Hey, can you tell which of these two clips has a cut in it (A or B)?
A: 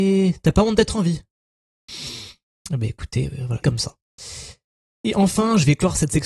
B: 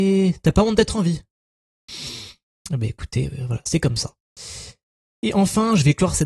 A